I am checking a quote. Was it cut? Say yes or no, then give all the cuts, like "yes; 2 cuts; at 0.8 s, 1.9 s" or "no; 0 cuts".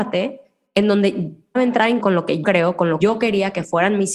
yes; 4 cuts; at 1.6 s, 2.0 s, 2.4 s, 3.0 s